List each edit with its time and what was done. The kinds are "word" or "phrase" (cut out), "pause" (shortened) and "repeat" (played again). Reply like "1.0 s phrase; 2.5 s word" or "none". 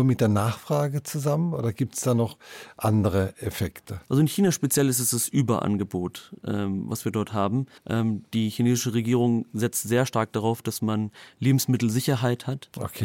4.0 s pause; 7.8 s pause